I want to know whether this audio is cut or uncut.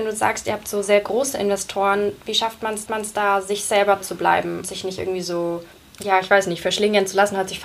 cut